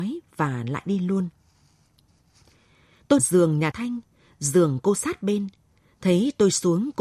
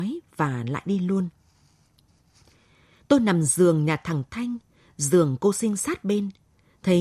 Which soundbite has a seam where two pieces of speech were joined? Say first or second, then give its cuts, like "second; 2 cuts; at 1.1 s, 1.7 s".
first; 3 cuts; at 3.2 s, 3.7 s, 5.0 s